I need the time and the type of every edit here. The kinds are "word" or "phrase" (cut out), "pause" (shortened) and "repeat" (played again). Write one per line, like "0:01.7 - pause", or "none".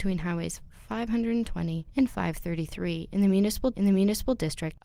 0:03.7 - repeat

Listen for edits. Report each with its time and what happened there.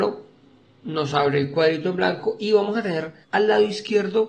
0:03.2 - pause

